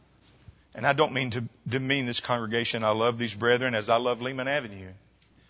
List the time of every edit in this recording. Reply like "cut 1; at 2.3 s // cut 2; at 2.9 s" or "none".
none